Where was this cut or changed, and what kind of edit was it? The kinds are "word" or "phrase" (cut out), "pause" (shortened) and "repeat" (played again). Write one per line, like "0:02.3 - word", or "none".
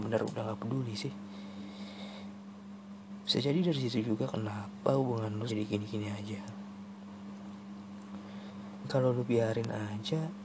0:05.5 - word
0:08.8 - word